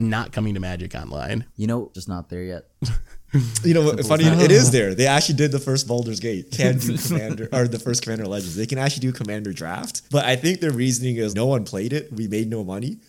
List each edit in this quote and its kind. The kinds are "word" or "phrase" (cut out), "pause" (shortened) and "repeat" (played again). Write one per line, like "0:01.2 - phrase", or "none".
0:01.5 - pause
0:01.9 - phrase
0:02.8 - pause
0:06.5 - phrase
0:10.1 - pause
0:11.3 - word